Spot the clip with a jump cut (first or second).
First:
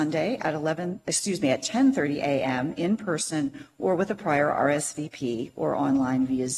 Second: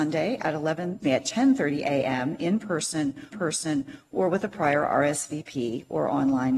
second